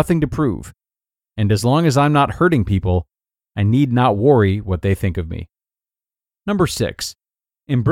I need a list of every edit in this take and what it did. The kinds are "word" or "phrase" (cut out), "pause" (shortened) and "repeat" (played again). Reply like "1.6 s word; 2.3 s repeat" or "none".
none